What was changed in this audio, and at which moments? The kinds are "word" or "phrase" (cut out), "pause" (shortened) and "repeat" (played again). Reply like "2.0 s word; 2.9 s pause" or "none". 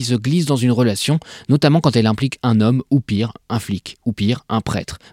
none